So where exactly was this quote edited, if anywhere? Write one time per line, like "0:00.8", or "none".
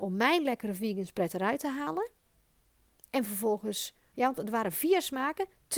none